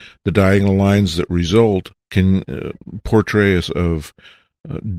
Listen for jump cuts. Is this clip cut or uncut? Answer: cut